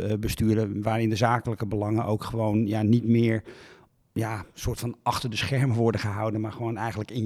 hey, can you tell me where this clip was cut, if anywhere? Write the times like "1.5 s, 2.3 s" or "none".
none